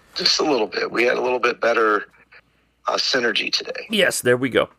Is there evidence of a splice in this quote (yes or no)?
no